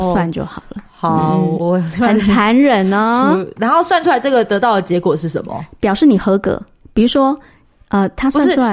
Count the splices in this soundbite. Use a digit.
0